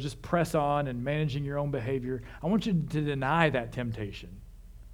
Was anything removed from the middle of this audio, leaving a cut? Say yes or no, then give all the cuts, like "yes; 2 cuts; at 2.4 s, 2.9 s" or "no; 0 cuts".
no; 0 cuts